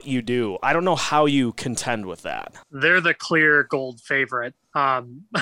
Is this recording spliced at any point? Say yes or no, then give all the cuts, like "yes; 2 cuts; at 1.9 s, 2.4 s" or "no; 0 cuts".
yes; 1 cut; at 2.6 s